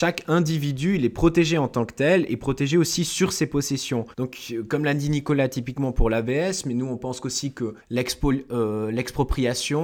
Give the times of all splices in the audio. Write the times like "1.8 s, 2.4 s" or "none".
4.1 s, 7.8 s